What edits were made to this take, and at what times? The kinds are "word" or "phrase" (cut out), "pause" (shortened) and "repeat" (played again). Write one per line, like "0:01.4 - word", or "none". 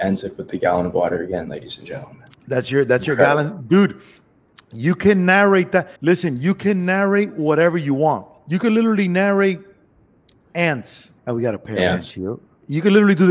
0:06.0 - pause
0:11.2 - pause

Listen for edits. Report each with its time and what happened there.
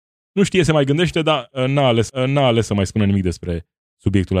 0:02.1 - repeat

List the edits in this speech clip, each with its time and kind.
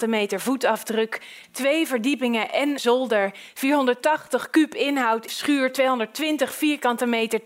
0:02.8 - word
0:05.3 - word

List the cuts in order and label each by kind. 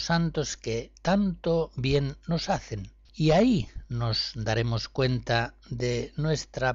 0:03.0 - pause

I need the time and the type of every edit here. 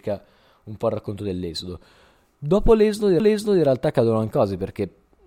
0:03.2 - repeat
0:04.3 - word

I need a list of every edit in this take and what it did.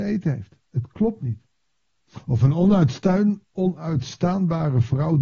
0:03.5 - pause

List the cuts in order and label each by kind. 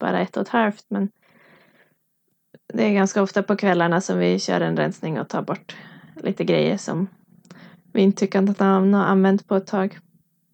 none

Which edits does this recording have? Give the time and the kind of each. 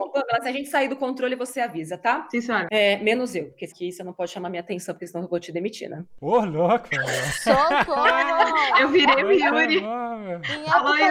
0:03.7 - word

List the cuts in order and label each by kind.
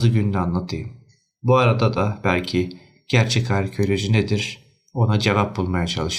none

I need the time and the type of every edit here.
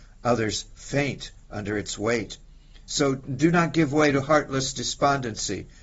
none

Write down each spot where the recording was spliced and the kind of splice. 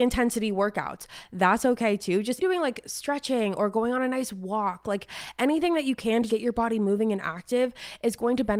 0:02.4 - word
0:06.3 - word

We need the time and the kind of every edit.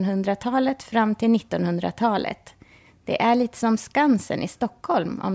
none

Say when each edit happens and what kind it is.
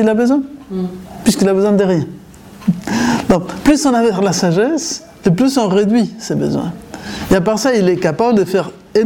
none

